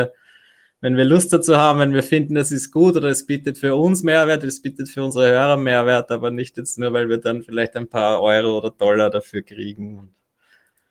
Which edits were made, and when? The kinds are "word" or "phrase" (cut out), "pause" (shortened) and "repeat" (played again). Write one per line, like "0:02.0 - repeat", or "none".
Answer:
none

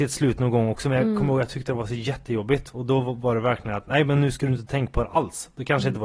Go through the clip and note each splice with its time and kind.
none

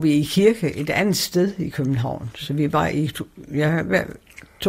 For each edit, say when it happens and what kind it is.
none

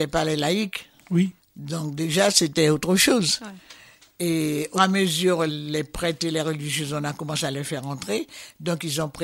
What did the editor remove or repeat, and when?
0:01.4 - pause
0:04.8 - word
0:05.5 - word

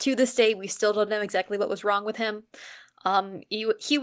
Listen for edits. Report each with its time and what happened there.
none

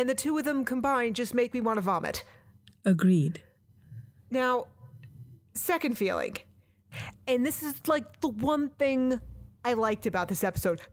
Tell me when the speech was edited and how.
none

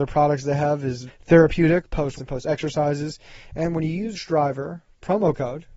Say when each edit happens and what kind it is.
0:01.1 - word
0:02.2 - word
0:04.1 - word

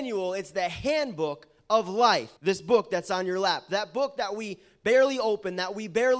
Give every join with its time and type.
0:02.4 - pause

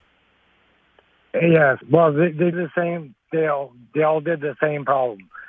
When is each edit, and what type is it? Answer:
0:01.8 - pause
0:02.5 - word

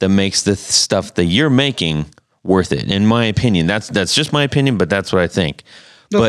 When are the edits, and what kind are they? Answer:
none

